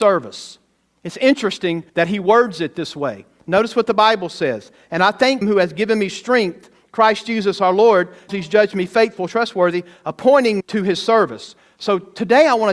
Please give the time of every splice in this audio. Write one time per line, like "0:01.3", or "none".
0:01.9
0:05.4
0:08.3
0:10.6